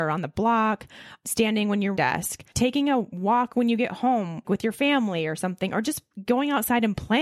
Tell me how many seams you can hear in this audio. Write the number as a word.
three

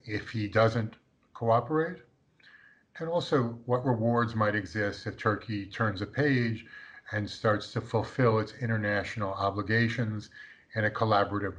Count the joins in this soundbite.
zero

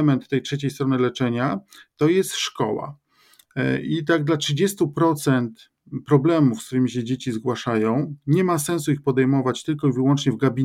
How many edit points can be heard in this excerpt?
zero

